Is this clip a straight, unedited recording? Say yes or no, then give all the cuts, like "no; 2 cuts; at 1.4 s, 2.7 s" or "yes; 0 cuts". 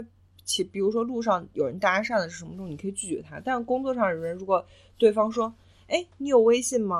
yes; 0 cuts